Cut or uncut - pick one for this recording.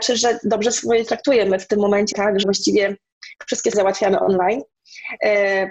cut